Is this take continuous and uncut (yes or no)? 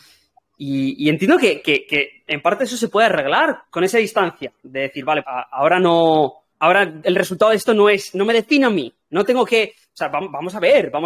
no